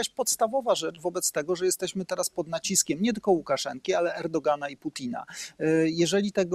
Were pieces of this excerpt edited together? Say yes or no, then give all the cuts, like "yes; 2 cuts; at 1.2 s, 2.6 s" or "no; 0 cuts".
no; 0 cuts